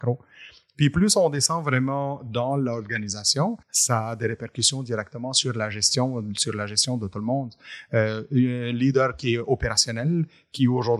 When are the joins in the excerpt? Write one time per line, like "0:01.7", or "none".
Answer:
0:03.6